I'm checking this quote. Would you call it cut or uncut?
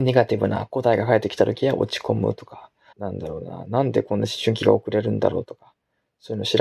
cut